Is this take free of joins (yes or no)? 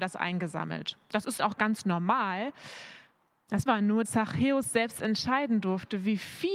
no